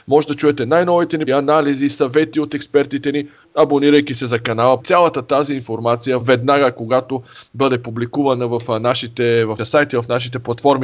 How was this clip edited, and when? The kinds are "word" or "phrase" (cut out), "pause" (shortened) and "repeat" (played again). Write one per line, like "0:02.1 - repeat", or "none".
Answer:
0:01.3 - word
0:03.4 - word
0:04.8 - word
0:06.2 - word
0:09.6 - word